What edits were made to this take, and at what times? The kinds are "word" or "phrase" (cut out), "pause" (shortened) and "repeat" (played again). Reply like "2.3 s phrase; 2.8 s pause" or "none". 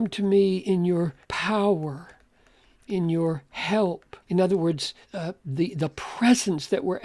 1.2 s pause; 4.2 s pause; 5.0 s pause